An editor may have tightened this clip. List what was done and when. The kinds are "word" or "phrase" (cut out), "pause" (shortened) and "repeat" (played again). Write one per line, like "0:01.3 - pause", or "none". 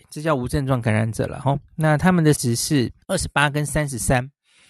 0:02.4 - word
0:03.0 - pause

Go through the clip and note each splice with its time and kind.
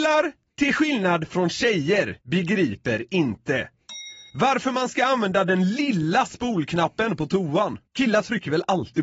0:02.2 - pause
0:04.3 - pause
0:07.9 - pause

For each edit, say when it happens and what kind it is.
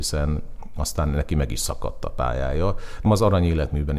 0:03.1 - word

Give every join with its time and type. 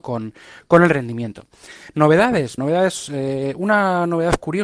0:02.6 - word

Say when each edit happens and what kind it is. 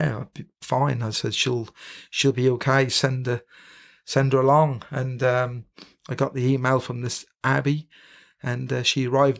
none

